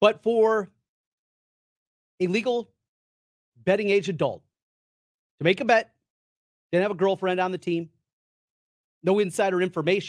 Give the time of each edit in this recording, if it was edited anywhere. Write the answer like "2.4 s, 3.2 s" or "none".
none